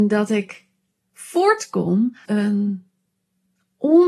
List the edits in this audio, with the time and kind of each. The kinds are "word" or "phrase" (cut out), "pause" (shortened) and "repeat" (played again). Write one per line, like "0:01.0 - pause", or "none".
0:02.2 - word